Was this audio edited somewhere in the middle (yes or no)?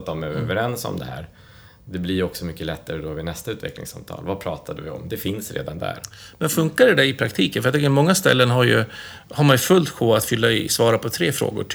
no